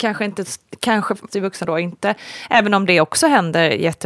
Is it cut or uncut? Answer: cut